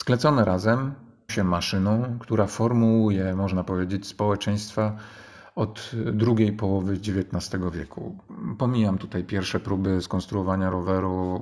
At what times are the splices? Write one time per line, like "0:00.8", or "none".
0:01.3